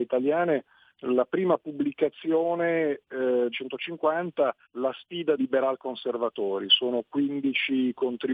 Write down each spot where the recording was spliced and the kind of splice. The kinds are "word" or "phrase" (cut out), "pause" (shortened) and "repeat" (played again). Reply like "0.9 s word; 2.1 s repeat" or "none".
3.5 s phrase; 4.6 s pause; 5.4 s word